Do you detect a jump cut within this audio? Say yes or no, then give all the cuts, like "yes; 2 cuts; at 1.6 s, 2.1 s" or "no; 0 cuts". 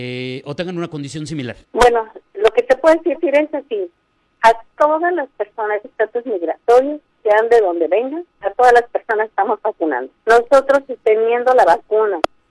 yes; 4 cuts; at 1.6 s, 3.1 s, 5.8 s, 10.2 s